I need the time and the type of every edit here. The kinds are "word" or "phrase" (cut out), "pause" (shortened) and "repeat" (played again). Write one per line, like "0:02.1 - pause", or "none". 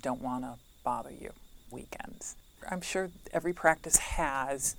0:01.7 - phrase

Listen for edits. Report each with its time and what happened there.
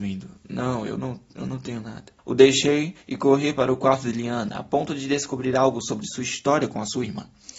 0:02.2 - pause

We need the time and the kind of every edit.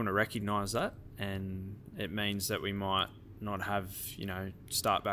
none

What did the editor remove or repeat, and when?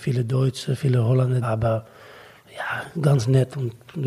0:01.4 - word
0:02.9 - word

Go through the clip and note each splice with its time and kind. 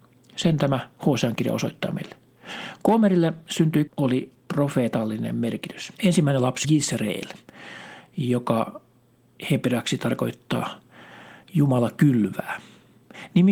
0:03.9 - phrase
0:06.0 - pause
0:06.6 - word

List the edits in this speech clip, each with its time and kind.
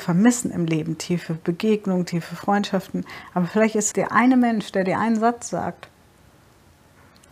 0:03.9 - word

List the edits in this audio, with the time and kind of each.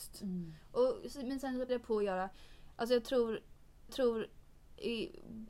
0:01.7 - word
0:03.9 - repeat

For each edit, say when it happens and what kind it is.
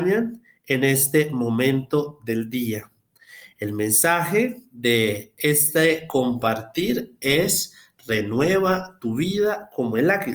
none

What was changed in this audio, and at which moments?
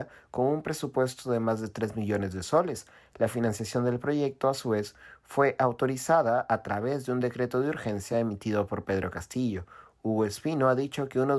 none

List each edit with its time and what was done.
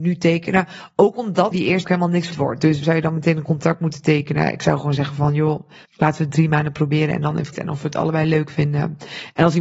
0:01.5 - word
0:01.8 - phrase
0:02.3 - word
0:02.8 - word
0:05.8 - pause
0:07.5 - phrase

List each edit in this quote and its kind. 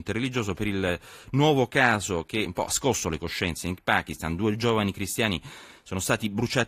0:02.4 - word

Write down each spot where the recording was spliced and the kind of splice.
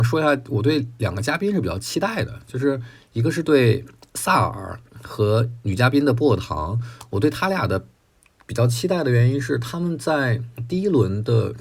none

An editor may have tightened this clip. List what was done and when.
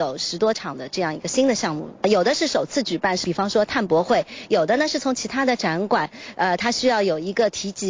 none

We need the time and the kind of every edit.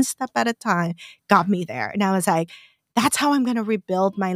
none

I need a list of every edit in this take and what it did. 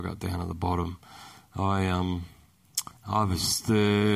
0:03.0 - pause

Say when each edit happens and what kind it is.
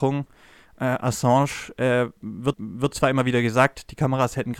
0:02.5 - repeat

